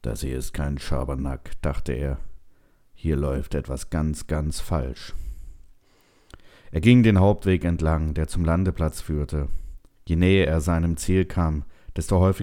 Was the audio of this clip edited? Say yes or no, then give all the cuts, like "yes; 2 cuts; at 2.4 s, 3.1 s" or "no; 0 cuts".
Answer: no; 0 cuts